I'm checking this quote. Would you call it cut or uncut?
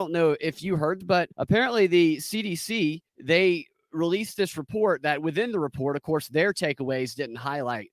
cut